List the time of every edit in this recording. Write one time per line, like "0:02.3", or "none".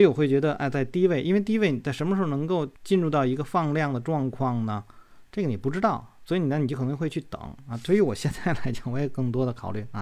0:02.8